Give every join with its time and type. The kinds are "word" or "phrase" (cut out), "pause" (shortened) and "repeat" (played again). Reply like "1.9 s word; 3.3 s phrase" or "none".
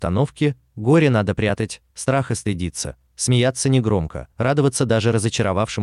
4.3 s pause

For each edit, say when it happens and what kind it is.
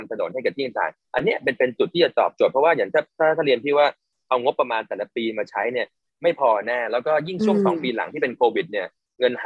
none

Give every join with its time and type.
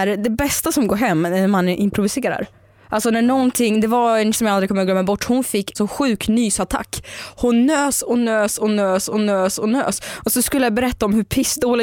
4.3 s word; 5.7 s word; 9.1 s repeat

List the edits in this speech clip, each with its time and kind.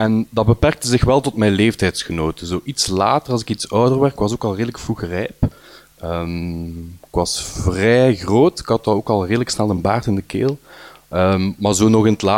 none

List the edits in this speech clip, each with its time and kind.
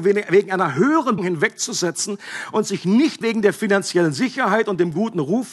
1.2 s word; 3.2 s word

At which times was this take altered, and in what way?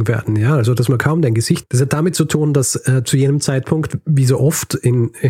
1.6 s word

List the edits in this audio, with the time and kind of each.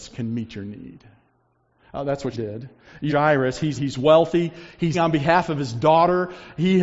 2.3 s word; 3.1 s word; 3.8 s word; 4.9 s word

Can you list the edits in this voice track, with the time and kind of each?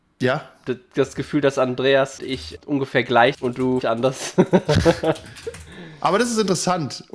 2.2 s word; 2.6 s word; 3.3 s word; 3.8 s word

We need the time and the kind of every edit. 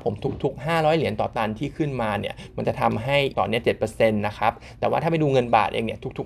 3.3 s word; 3.6 s word

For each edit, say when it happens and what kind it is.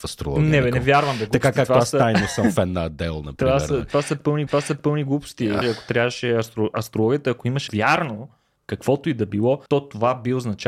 4.5 s repeat; 5.6 s word; 7.7 s word; 9.7 s pause

